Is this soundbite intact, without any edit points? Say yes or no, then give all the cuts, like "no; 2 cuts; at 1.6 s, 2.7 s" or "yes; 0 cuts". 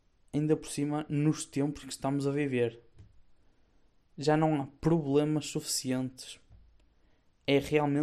yes; 0 cuts